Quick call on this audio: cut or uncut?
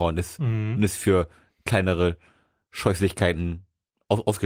uncut